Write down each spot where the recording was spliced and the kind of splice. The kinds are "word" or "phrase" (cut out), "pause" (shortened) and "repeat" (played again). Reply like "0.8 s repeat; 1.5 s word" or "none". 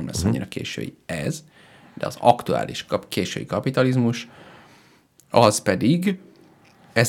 none